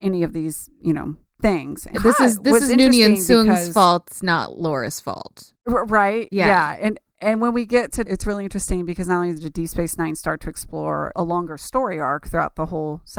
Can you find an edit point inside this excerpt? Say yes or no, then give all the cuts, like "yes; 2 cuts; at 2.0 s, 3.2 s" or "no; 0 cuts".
yes; 3 cuts; at 1.9 s, 8.0 s, 11.1 s